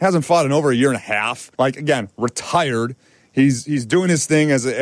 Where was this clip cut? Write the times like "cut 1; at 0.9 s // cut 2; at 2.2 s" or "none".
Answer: cut 1; at 1.5 s

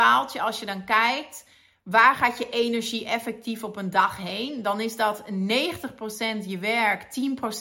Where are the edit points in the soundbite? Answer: none

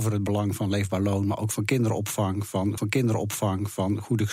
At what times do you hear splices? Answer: cut 1; at 2.8 s

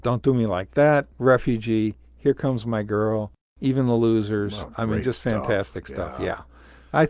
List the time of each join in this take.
cut 1; at 1.1 s

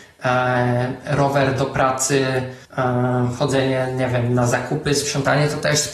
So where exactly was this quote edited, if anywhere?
cut 1; at 2.6 s

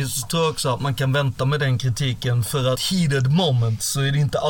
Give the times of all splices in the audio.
cut 1; at 2.8 s

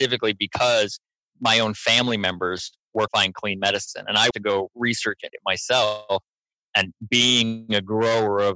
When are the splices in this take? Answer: cut 1; at 3.1 s // cut 2; at 4.3 s // cut 3; at 5.3 s

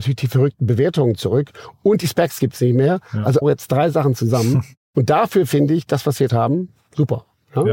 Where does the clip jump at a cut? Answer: cut 1; at 3.4 s // cut 2; at 6.3 s

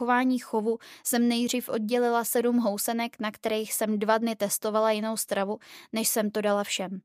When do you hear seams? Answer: none

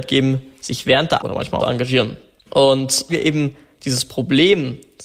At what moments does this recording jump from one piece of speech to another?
cut 1; at 1.2 s // cut 2; at 1.6 s // cut 3; at 3.1 s

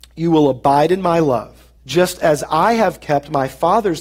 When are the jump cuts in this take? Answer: cut 1; at 1.8 s

